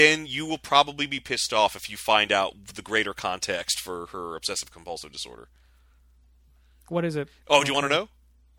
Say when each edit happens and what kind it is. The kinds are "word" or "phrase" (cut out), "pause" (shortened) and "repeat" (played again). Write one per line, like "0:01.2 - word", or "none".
none